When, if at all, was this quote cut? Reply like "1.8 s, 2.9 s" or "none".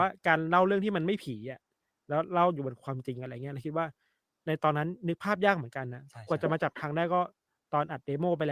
none